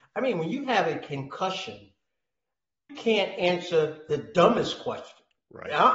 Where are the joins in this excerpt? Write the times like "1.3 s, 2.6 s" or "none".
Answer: 2.9 s